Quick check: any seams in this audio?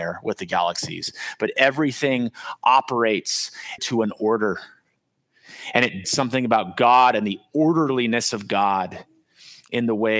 yes; 2 cuts; at 3.8 s, 6.0 s

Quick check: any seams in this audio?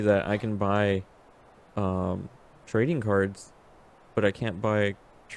no; 0 cuts

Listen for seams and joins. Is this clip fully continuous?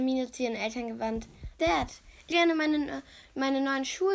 no; 2 cuts; at 1.6 s, 2.3 s

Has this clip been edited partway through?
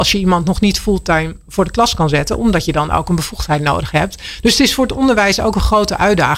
no; 0 cuts

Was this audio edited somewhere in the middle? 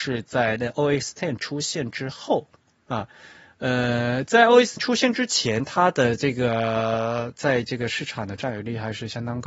yes; 1 cut; at 4.8 s

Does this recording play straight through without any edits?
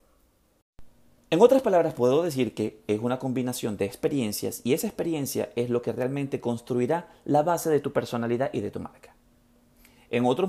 no; 1 cut; at 1.2 s

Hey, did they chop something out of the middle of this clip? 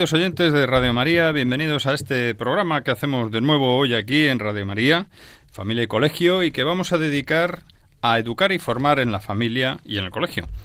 no; 0 cuts

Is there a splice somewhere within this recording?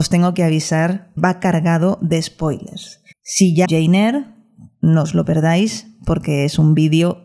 yes; 3 cuts; at 1.2 s, 3.1 s, 3.7 s

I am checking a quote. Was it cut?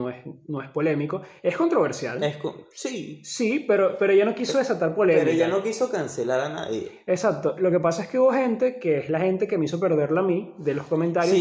no; 0 cuts

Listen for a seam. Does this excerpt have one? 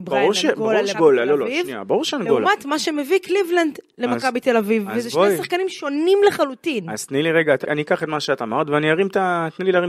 yes; 2 cuts; at 0.9 s, 7.6 s

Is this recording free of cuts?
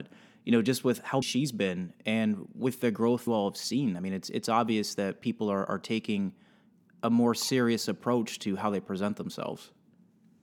no; 2 cuts; at 1.2 s, 3.3 s

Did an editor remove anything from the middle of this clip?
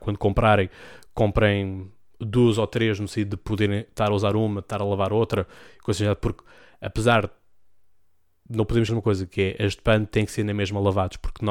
yes; 1 cut; at 8.9 s

